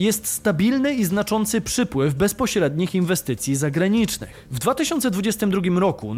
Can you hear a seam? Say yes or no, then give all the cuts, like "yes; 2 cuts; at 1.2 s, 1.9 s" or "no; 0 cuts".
no; 0 cuts